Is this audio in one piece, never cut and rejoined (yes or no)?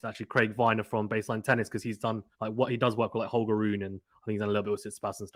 no